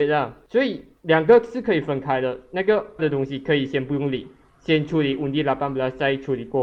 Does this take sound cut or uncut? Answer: cut